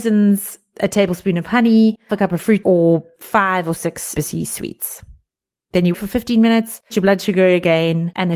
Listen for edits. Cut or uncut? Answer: cut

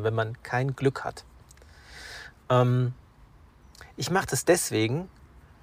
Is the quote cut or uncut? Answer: uncut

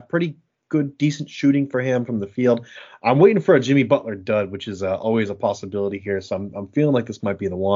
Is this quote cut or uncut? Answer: uncut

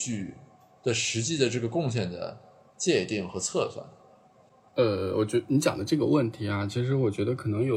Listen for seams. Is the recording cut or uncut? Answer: uncut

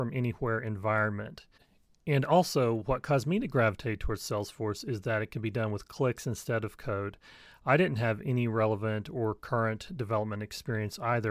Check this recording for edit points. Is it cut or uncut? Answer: uncut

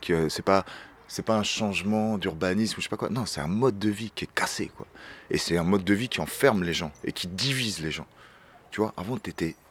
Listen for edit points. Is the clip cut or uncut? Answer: uncut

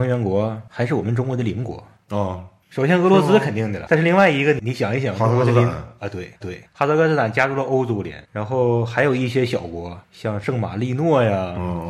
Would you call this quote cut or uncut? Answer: cut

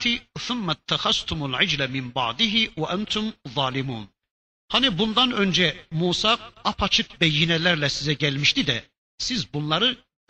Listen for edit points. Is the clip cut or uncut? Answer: uncut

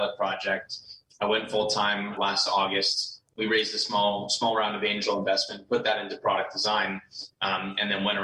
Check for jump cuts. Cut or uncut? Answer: cut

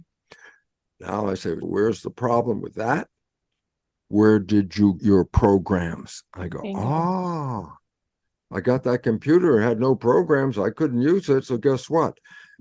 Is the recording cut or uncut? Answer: cut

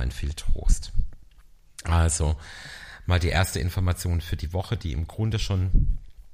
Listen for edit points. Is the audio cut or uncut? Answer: uncut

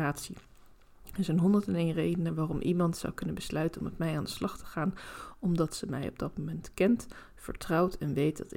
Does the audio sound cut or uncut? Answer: uncut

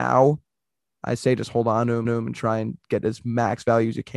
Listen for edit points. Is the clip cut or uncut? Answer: cut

